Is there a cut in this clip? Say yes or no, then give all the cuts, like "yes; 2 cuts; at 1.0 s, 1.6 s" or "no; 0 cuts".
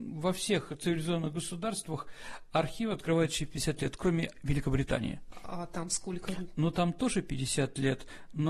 no; 0 cuts